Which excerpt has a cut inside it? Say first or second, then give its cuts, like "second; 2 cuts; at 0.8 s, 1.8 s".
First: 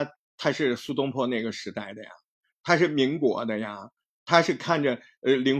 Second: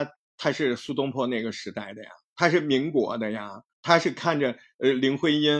second; 2 cuts; at 2.3 s, 3.7 s